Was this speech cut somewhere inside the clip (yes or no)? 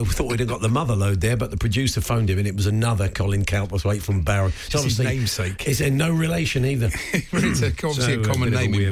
no